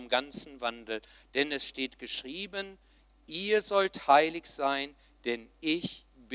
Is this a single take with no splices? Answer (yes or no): yes